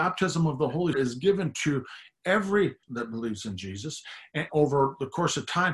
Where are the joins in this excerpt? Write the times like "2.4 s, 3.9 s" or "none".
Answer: 0.9 s, 2.8 s, 4.5 s